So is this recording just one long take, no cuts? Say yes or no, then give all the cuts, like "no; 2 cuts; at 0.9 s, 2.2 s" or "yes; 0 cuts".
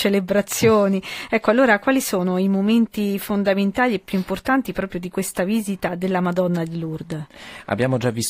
yes; 0 cuts